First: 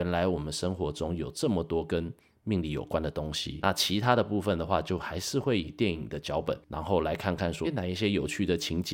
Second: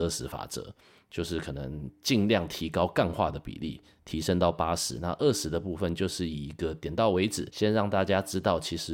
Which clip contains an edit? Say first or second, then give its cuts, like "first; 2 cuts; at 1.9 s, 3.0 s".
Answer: first; 1 cut; at 7.6 s